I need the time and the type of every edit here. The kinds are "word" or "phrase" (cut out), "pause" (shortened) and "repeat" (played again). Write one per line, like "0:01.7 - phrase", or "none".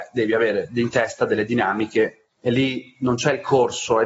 0:02.3 - pause